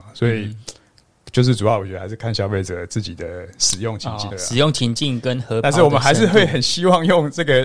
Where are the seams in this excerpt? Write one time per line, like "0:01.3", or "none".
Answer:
0:04.3